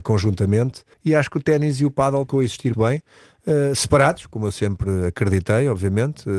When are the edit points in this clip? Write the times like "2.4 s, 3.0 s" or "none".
0.9 s, 2.3 s, 2.7 s